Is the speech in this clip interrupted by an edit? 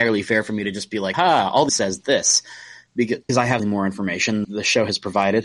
yes; 5 cuts; at 1.1 s, 1.7 s, 3.3 s, 3.6 s, 4.4 s

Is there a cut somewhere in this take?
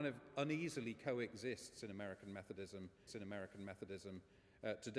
yes; 1 cut; at 3.1 s

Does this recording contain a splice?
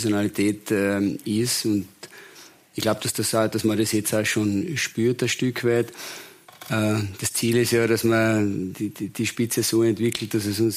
no; 0 cuts

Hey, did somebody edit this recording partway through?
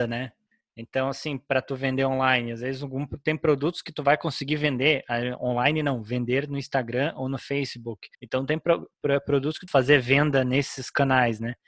yes; 2 cuts; at 8.1 s, 9.7 s

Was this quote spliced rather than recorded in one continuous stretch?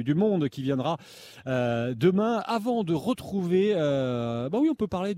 no; 0 cuts

